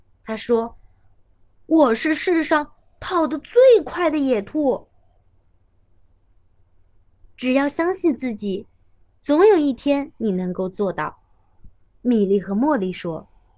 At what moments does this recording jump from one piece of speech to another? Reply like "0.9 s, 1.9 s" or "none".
10.1 s